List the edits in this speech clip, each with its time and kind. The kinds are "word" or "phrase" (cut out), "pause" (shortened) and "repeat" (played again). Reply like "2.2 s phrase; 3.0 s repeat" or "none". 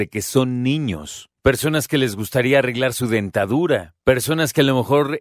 1.4 s pause; 4.0 s pause

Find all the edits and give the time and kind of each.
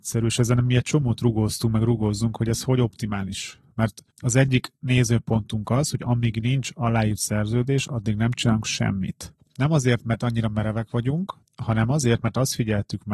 4.1 s pause; 9.4 s pause; 11.4 s pause

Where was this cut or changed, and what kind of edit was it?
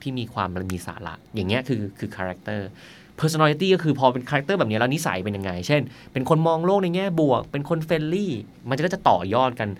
none

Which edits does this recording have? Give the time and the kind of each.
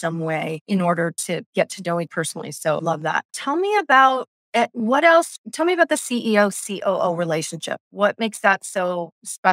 2.1 s phrase; 2.8 s phrase; 3.3 s pause

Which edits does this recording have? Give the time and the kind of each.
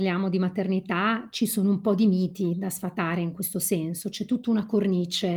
none

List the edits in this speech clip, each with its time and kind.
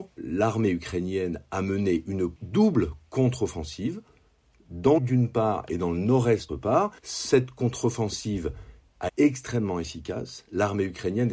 5.0 s phrase; 6.5 s word; 7.0 s pause; 9.1 s word

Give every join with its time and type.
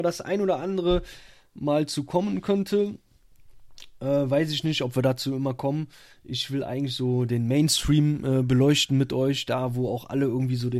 none

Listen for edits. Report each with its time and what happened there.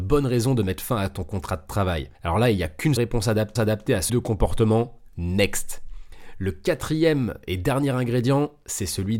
2.1 s pause; 3.0 s word; 3.6 s repeat; 4.1 s word

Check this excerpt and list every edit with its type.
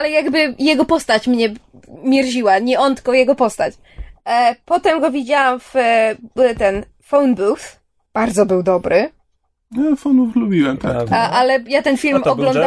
none

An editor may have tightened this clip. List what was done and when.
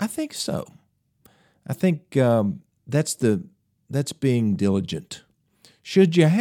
none

